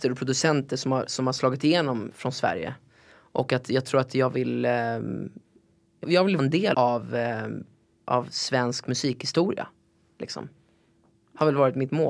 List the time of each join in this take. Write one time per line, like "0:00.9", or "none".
0:06.0
0:06.4
0:06.7